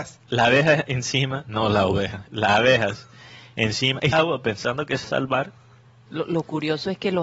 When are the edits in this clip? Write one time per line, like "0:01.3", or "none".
0:04.1
0:05.0

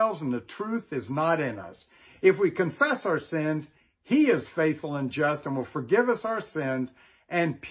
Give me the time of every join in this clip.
none

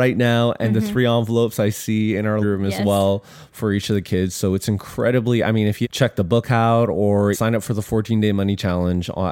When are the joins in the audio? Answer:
0:02.4
0:05.8
0:07.3

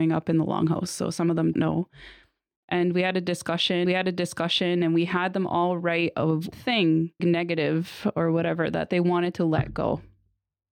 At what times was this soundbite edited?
0:01.5
0:03.9
0:06.5
0:07.2

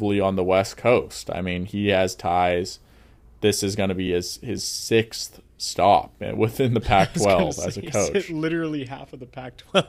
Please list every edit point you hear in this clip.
none

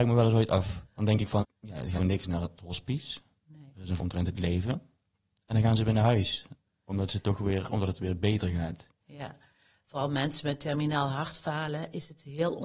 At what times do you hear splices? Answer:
0:01.4
0:02.0
0:04.0

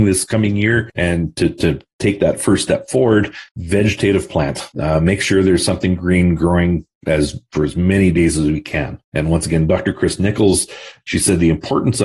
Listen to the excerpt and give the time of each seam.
0:03.5
0:04.7
0:09.0

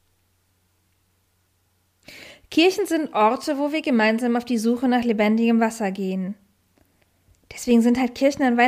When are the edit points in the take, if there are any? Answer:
none

